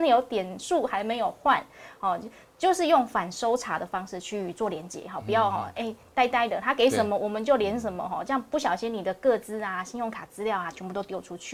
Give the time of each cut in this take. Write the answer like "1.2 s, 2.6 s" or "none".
none